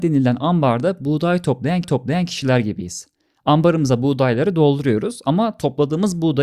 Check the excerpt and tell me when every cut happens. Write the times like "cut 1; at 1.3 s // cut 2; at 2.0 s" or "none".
cut 1; at 1.8 s